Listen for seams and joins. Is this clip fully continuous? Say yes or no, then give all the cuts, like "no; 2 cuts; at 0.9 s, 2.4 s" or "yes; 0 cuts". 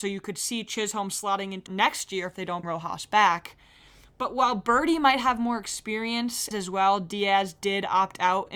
no; 3 cuts; at 1.7 s, 2.6 s, 6.5 s